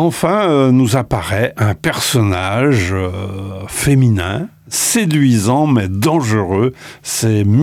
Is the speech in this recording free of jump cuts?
yes; 0 cuts

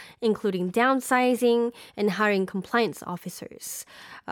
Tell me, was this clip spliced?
no; 0 cuts

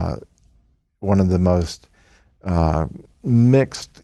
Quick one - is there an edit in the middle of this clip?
no; 0 cuts

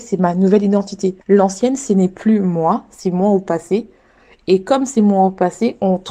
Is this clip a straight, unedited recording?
no; 1 cut; at 1.2 s

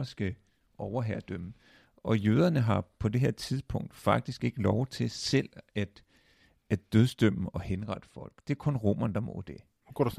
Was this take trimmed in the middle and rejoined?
no; 0 cuts

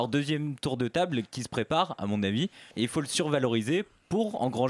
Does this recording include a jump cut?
yes; 1 cut; at 2.7 s

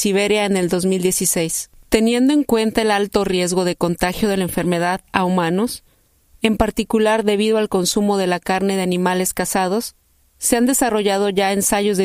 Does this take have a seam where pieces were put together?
no; 0 cuts

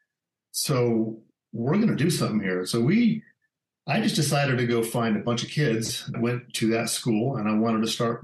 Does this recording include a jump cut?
yes; 1 cut; at 6.1 s

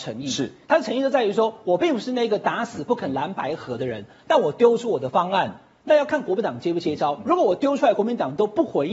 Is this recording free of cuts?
yes; 0 cuts

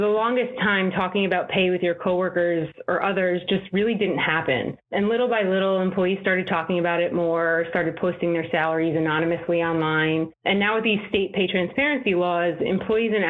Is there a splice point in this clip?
no; 0 cuts

